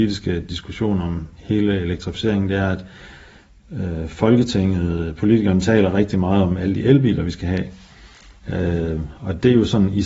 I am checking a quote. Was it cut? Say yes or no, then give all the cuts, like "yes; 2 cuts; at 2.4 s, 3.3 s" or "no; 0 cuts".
no; 0 cuts